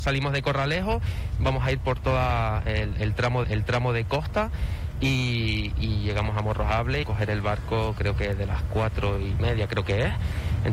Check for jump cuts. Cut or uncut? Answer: cut